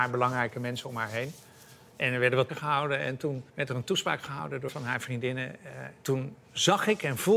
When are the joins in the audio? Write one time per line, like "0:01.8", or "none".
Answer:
0:02.5
0:03.5
0:04.7